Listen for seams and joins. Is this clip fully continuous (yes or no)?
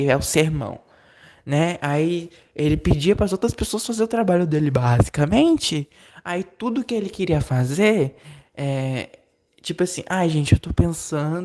yes